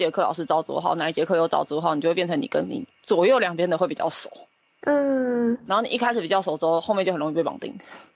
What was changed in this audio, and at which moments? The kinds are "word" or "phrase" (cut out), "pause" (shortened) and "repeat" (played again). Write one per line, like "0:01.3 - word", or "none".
0:02.9 - pause

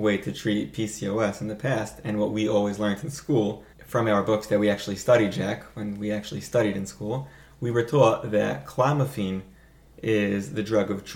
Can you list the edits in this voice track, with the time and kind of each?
0:03.7 - pause

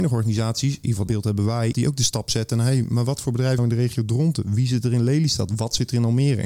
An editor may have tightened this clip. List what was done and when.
0:01.1 - word
0:01.7 - phrase
0:03.6 - phrase

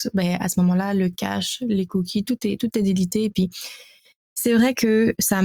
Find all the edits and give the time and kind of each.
0:02.7 - phrase

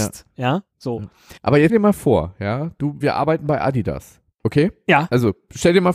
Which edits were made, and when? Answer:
0:01.4 - pause
0:01.7 - word
0:03.0 - word
0:04.3 - pause

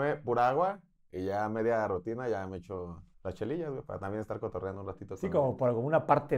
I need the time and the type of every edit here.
0:03.1 - pause

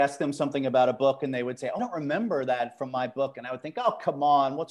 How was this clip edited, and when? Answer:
0:01.8 - word

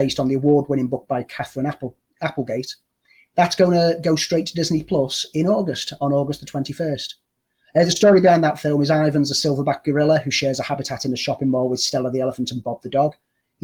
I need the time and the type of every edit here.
none

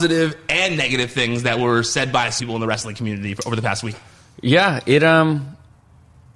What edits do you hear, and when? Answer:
0:02.4 - word
0:03.9 - word

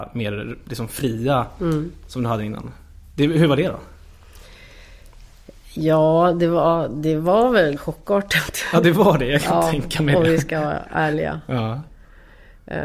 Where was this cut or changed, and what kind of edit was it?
0:07.8 - word

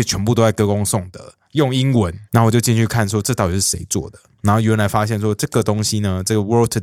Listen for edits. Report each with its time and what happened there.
0:02.3 - pause

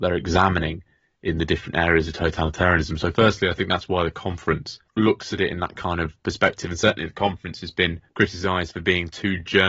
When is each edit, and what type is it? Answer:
0:04.9 - pause
0:08.1 - pause

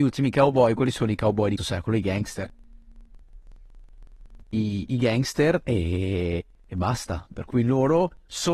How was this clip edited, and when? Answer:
0:01.6 - word
0:04.4 - pause

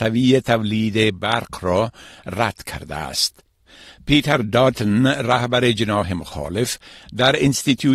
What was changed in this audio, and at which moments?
none

